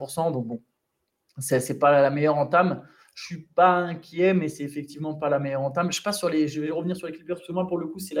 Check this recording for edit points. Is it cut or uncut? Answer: uncut